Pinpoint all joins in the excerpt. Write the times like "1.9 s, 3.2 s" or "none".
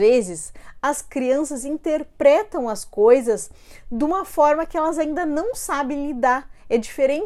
none